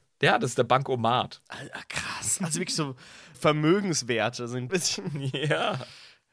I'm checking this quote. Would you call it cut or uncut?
cut